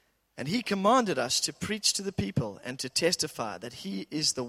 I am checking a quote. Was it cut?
no; 0 cuts

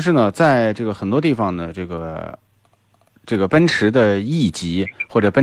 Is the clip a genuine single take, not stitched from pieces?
yes; 0 cuts

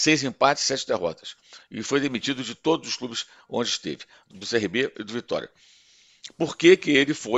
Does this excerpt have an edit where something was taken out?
yes; 1 cut; at 4.3 s

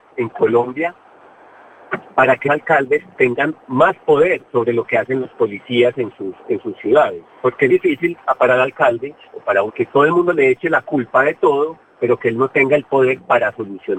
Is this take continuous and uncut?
no; 5 cuts; at 2.4 s, 4.5 s, 7.3 s, 7.7 s, 9.7 s

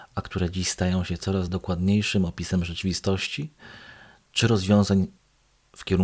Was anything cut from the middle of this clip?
no; 0 cuts

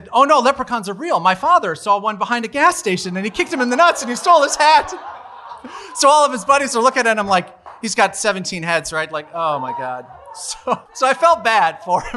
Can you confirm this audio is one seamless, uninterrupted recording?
no; 1 cut; at 10.9 s

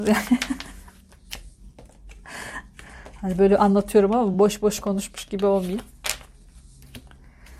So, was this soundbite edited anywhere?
no; 0 cuts

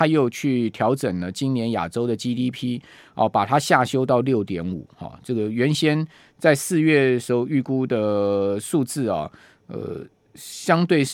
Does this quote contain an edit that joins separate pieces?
no; 0 cuts

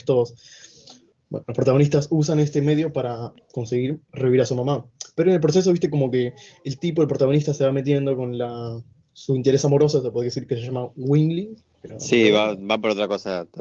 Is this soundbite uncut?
yes; 0 cuts

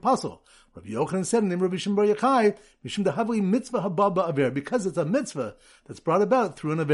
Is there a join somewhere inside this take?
no; 0 cuts

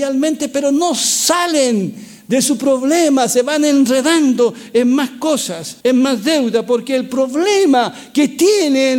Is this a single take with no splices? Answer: no; 1 cut; at 5.8 s

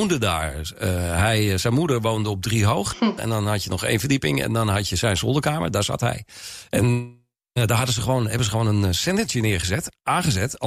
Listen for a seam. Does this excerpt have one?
no; 0 cuts

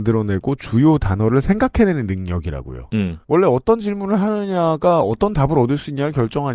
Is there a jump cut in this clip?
yes; 1 cut; at 3.2 s

